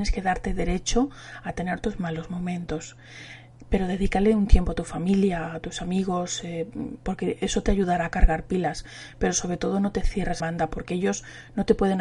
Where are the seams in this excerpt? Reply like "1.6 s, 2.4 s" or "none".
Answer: 10.4 s